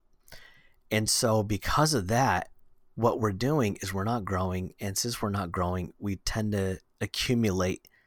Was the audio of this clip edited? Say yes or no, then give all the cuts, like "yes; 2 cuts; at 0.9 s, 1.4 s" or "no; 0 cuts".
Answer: no; 0 cuts